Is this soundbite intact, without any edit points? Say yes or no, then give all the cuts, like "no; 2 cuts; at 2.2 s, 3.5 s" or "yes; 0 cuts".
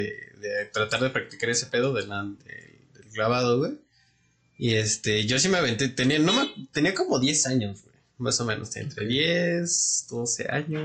yes; 0 cuts